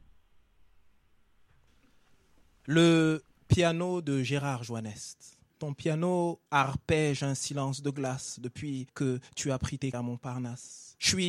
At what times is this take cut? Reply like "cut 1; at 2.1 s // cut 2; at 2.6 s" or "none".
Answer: cut 1; at 5.5 s // cut 2; at 6.5 s // cut 3; at 8.9 s // cut 4; at 9.9 s